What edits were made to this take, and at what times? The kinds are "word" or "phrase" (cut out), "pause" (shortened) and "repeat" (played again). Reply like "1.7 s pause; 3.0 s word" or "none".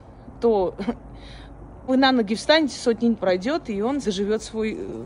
1.9 s word; 3.2 s word; 4.0 s word